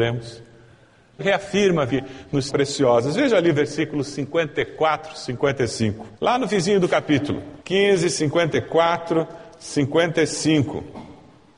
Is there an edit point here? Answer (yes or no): yes